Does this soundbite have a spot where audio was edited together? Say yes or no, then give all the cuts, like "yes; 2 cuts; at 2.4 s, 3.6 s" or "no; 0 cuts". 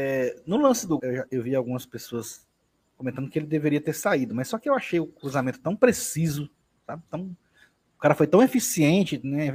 yes; 1 cut; at 1.0 s